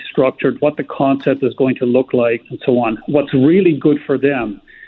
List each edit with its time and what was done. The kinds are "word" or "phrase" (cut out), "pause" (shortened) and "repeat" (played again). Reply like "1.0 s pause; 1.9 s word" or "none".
2.4 s word